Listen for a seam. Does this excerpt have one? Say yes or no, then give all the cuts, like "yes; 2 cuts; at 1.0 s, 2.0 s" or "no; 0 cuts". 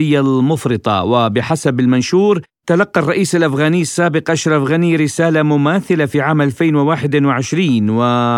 no; 0 cuts